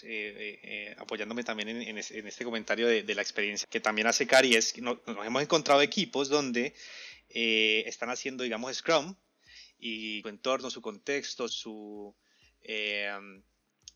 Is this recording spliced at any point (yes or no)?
yes